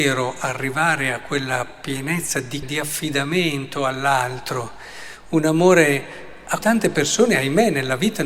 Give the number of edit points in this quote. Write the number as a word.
two